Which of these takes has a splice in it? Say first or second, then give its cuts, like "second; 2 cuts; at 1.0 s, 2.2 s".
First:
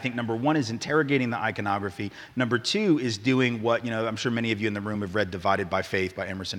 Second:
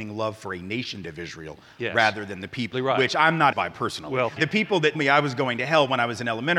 second; 5 cuts; at 1.0 s, 2.7 s, 3.5 s, 4.4 s, 4.9 s